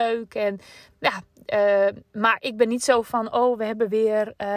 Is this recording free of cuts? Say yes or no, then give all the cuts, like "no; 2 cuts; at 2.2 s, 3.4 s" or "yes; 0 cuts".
no; 1 cut; at 2.0 s